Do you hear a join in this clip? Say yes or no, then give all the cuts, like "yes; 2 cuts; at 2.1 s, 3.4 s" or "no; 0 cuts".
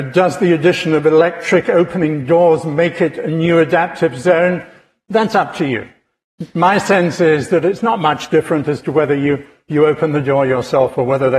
no; 0 cuts